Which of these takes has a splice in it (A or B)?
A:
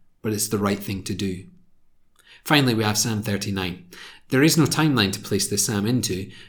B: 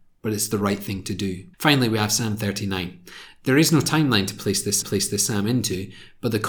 B